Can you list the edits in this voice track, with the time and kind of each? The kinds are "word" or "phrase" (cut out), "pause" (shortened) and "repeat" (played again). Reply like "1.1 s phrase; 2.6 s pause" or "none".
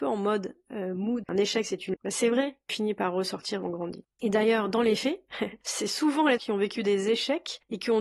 1.2 s word; 1.9 s word; 2.7 s word; 3.6 s word; 6.4 s word

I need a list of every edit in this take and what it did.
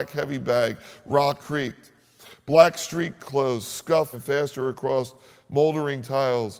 1.4 s word; 4.1 s word

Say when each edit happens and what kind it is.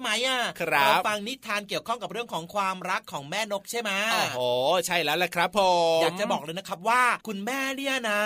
7.2 s pause

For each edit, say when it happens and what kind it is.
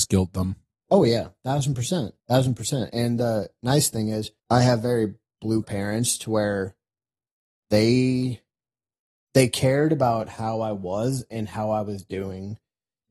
2.2 s pause; 4.4 s pause; 5.6 s word

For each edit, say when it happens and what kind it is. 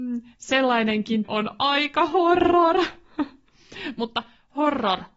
1.2 s word

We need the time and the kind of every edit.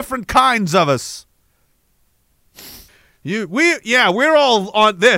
2.9 s pause

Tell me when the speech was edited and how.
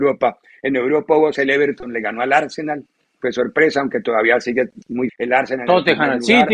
1.3 s word; 5.1 s word

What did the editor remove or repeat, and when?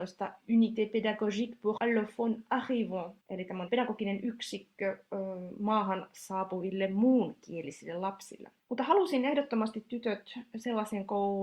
1.8 s word; 3.2 s pause; 3.7 s word; 8.6 s pause

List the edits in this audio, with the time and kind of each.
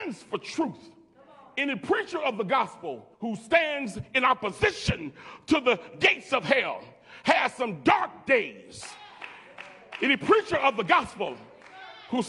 3.1 s pause

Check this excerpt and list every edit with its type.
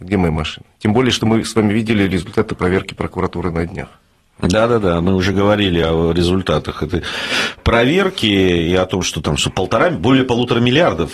none

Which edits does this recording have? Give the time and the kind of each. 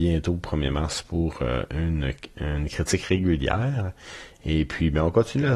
none

